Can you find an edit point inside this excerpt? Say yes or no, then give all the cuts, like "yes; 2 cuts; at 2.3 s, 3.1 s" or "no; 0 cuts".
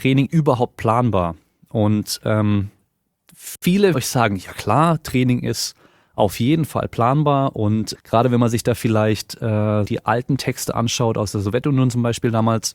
yes; 3 cuts; at 3.9 s, 7.9 s, 9.9 s